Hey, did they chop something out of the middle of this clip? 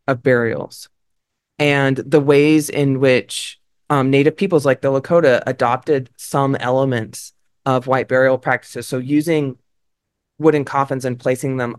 no; 0 cuts

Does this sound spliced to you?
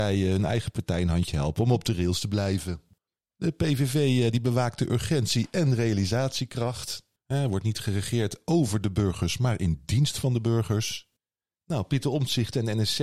no; 0 cuts

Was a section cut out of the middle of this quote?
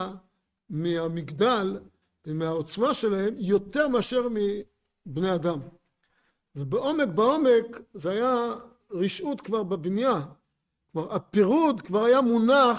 no; 0 cuts

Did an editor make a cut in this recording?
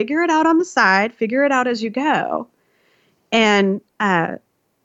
no; 0 cuts

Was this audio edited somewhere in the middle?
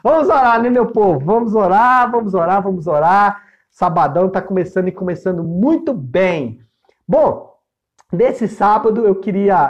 no; 0 cuts

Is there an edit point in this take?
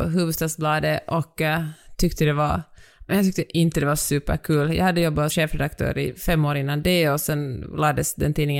yes; 1 cut; at 5.3 s

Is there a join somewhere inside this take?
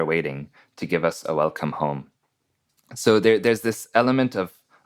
no; 0 cuts

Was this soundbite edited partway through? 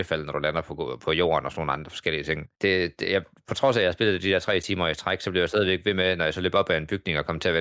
yes; 1 cut; at 2.5 s

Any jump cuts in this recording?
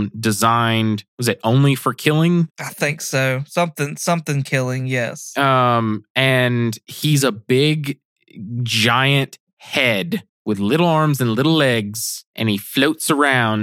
yes; 3 cuts; at 1.1 s, 2.5 s, 10.3 s

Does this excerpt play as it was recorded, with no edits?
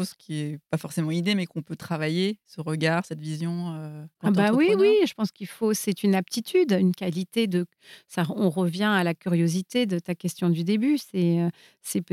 yes; 0 cuts

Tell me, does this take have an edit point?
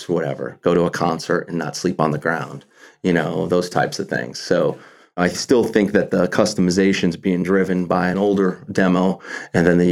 no; 0 cuts

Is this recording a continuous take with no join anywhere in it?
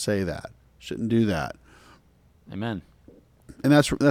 yes; 0 cuts

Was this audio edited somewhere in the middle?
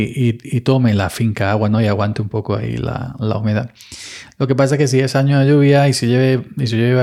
no; 0 cuts

